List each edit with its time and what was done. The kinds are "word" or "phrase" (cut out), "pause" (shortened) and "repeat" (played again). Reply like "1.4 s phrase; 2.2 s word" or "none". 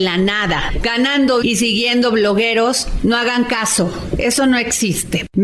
1.4 s word

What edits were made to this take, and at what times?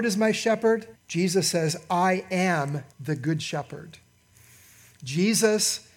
1.0 s pause; 2.9 s pause

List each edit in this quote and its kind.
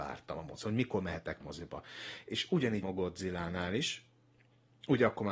1.4 s word; 2.8 s word

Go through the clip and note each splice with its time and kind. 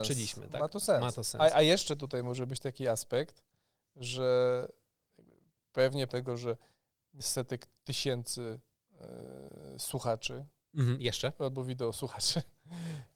6.1 s word; 7.2 s word

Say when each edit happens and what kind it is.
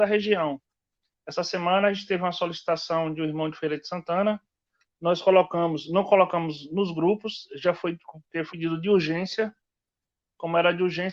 8.5 s word

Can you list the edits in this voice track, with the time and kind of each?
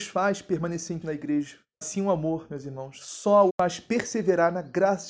1.0 s word; 1.8 s word; 3.5 s word

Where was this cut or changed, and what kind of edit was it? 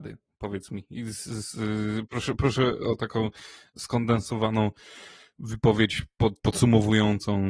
none

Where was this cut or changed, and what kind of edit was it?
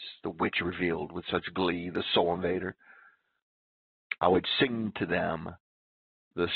none

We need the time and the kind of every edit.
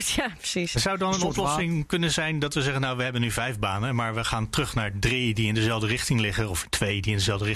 none

